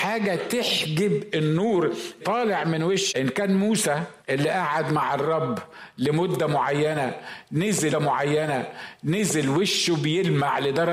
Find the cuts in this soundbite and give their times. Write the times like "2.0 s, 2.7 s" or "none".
2.2 s, 3.1 s, 4.2 s, 7.9 s